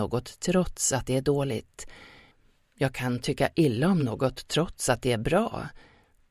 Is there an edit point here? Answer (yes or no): no